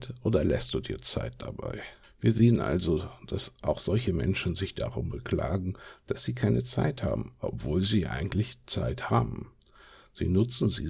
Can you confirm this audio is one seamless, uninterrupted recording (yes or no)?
yes